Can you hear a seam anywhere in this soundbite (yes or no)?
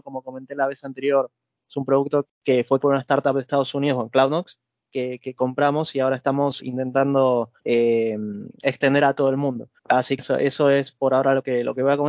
yes